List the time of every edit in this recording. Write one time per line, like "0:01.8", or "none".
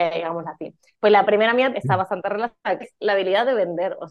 0:01.7
0:02.8